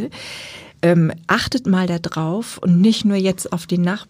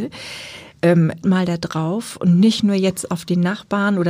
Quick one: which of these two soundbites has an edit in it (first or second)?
second